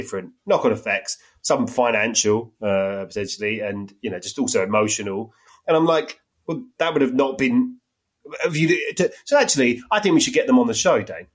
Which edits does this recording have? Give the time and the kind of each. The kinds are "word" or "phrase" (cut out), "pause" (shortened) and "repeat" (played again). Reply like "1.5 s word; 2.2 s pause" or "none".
none